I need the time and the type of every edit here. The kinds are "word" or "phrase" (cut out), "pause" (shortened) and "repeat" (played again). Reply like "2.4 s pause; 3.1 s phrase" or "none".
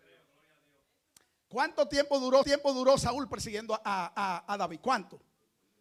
2.4 s repeat; 4.1 s repeat